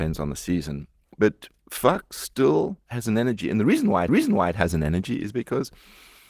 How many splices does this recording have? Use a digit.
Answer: 3